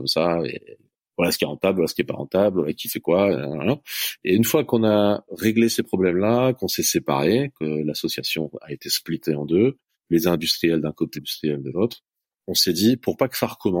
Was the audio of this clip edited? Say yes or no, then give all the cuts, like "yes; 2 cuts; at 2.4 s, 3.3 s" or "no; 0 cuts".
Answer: yes; 1 cut; at 11.1 s